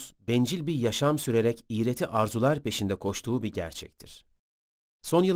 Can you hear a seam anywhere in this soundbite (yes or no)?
no